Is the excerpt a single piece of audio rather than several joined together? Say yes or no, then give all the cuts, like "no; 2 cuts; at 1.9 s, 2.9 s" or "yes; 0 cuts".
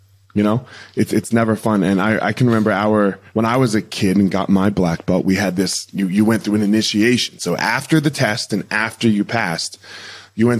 no; 1 cut; at 3.3 s